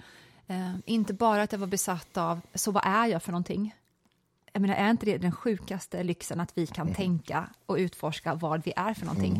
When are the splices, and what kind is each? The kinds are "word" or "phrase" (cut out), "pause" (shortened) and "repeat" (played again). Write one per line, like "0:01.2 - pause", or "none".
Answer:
none